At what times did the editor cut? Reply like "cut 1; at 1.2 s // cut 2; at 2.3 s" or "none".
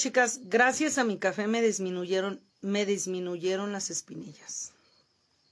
cut 1; at 2.5 s